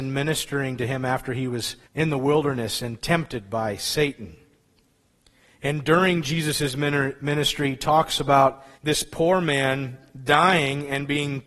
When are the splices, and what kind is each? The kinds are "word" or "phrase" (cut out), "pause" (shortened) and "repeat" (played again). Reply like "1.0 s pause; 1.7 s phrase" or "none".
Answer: 1.8 s pause; 8.7 s pause